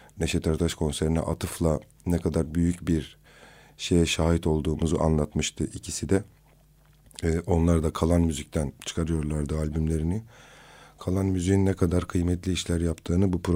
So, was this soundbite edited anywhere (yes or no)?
no